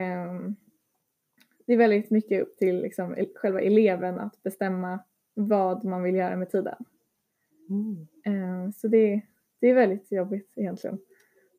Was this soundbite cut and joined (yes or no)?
no